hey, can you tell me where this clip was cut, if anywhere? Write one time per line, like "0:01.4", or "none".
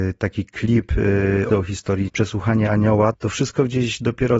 0:01.5
0:02.1
0:03.1